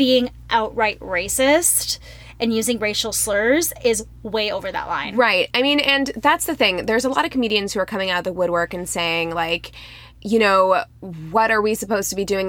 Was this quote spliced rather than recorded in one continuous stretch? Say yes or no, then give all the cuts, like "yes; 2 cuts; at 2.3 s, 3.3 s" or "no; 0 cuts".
no; 0 cuts